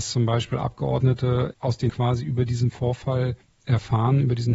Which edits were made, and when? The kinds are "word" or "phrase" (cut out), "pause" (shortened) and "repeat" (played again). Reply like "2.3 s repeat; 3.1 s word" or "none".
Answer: 1.5 s word; 1.9 s word; 3.4 s pause